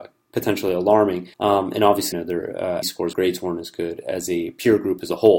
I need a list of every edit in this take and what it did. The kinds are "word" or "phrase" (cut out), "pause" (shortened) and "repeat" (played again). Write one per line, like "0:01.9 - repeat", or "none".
0:01.3 - pause
0:02.1 - word
0:02.8 - word
0:03.1 - phrase